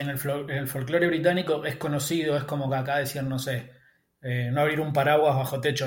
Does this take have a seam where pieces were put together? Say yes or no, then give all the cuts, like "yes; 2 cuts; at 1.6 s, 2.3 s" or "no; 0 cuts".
no; 0 cuts